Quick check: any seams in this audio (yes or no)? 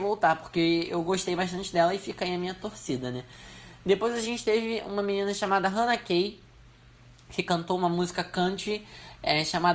no